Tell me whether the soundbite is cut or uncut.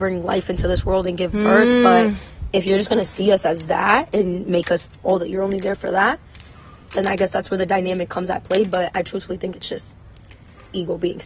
uncut